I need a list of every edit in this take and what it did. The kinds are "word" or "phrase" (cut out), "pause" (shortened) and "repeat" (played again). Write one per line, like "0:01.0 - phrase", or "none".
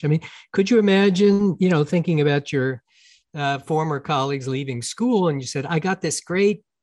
none